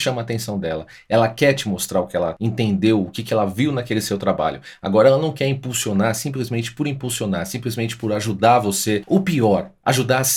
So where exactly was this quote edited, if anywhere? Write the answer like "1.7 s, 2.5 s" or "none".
none